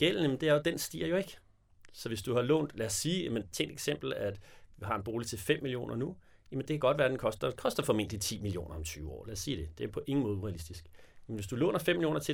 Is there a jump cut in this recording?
yes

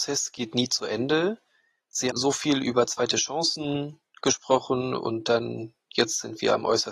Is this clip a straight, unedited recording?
no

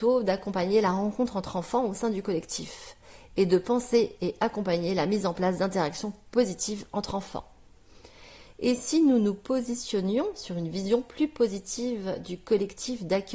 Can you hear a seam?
no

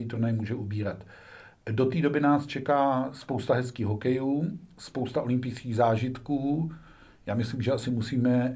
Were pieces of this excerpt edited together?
no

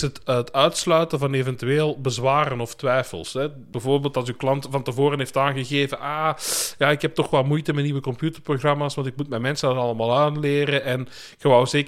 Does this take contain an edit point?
no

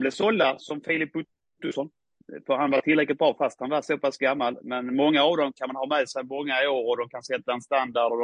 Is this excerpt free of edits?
yes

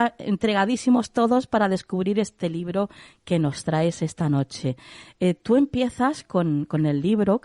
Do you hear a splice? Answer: no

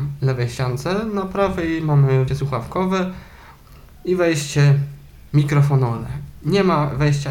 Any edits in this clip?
yes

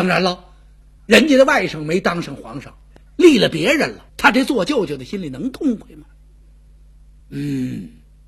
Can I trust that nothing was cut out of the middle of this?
no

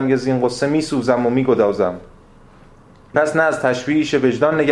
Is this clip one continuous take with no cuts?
no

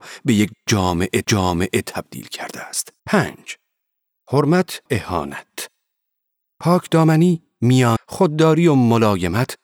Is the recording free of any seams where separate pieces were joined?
no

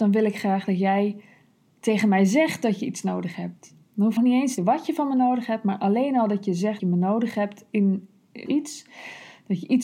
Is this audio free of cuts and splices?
no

